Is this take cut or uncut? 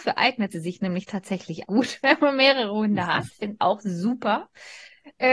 cut